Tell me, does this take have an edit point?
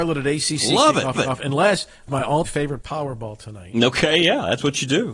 yes; 4 cuts; at 1.2 s, 2.1 s, 2.5 s, 2.8 s

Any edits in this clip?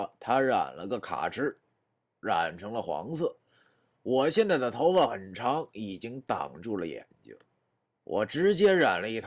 no; 0 cuts

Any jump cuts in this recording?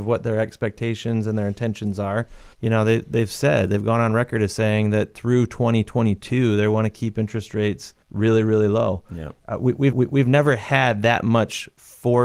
yes; 3 cuts; at 2.5 s, 8.0 s, 9.9 s

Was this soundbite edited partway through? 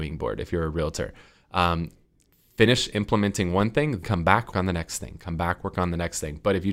yes; 2 cuts; at 4.0 s, 4.5 s

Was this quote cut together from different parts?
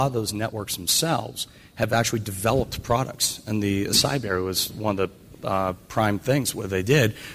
no; 0 cuts

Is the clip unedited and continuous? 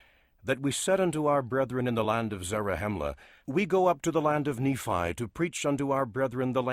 yes; 0 cuts

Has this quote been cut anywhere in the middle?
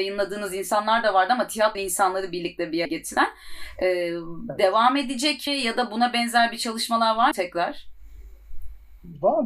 yes; 4 cuts; at 1.7 s, 2.8 s, 5.5 s, 7.3 s

